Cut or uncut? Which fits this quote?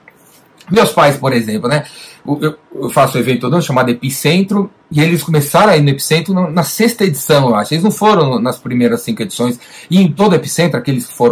uncut